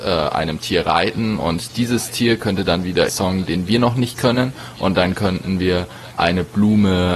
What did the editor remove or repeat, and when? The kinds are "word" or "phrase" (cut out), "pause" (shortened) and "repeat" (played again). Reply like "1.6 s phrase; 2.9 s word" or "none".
3.1 s word